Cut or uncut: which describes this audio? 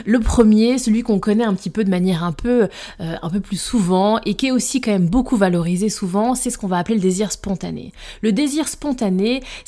uncut